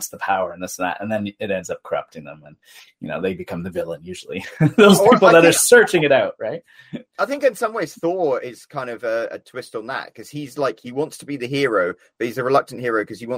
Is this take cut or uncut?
uncut